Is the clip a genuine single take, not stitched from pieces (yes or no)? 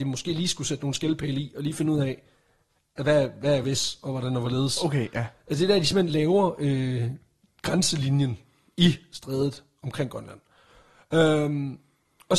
yes